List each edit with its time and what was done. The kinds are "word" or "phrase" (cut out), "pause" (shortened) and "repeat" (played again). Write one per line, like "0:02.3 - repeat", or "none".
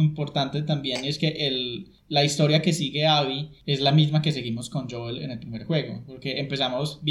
none